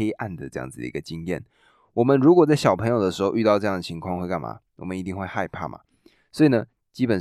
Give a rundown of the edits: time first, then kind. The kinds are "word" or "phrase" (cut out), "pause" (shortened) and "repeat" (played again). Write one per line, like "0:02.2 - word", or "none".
none

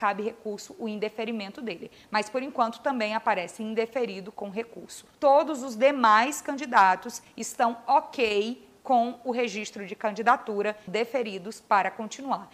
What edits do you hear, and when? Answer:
0:05.1 - pause
0:10.9 - word

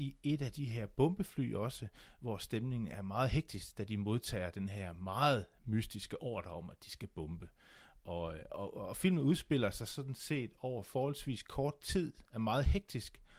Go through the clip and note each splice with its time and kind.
none

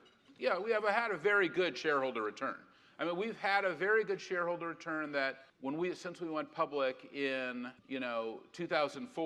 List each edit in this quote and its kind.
0:05.5 - pause
0:07.8 - pause

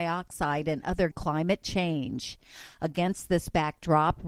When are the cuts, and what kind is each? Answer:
0:01.1 - phrase

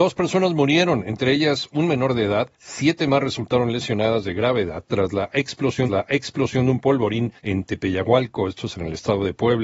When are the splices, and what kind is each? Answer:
0:02.5 - pause
0:05.9 - repeat
0:07.4 - pause

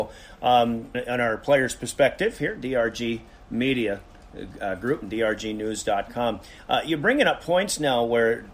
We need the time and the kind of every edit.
0:00.9 - word

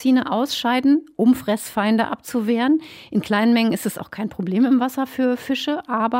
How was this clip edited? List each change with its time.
none

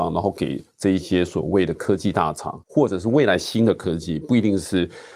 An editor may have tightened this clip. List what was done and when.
0:02.6 - pause

